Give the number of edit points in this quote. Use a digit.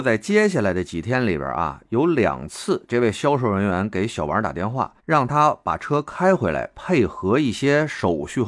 1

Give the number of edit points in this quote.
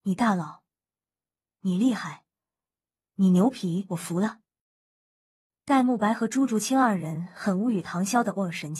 0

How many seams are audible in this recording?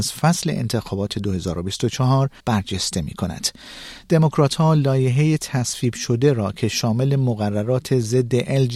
1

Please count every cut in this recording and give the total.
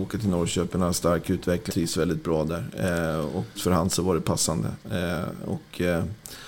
2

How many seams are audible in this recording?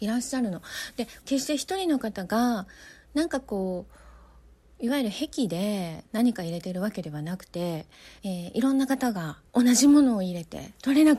3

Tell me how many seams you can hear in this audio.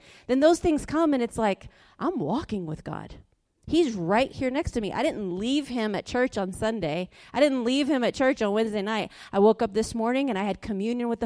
0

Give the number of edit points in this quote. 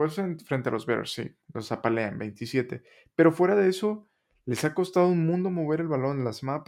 1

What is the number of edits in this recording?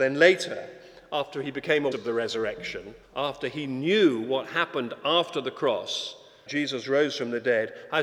3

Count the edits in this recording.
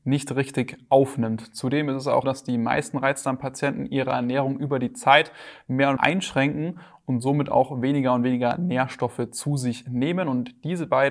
2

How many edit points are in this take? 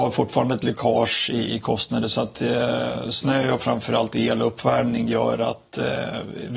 0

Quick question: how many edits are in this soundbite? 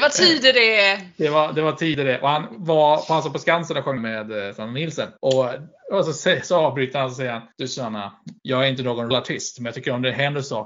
5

